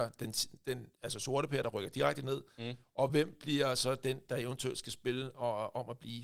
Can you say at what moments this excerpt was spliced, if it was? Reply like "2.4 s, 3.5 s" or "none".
none